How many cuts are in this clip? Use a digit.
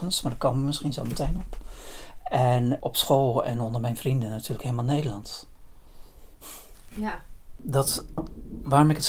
0